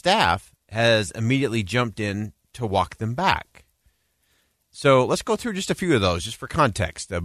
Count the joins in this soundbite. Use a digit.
0